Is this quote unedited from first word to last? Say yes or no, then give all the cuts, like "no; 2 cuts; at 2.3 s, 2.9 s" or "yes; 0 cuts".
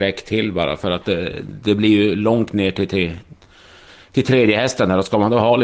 yes; 0 cuts